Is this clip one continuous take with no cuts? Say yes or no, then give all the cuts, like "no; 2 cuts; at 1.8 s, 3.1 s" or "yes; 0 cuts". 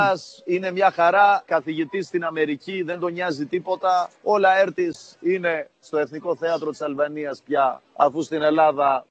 no; 2 cuts; at 1.5 s, 4.2 s